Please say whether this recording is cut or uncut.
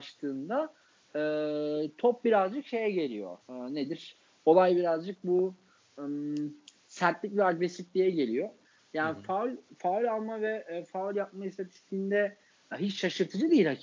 cut